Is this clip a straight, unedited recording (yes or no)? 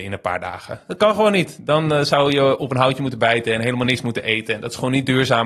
yes